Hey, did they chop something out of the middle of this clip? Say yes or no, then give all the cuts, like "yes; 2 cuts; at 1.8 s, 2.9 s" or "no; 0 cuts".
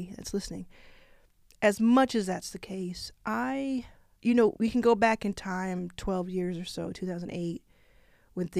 yes; 2 cuts; at 4.2 s, 4.6 s